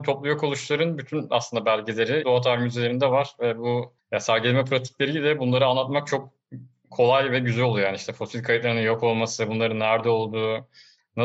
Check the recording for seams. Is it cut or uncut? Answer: cut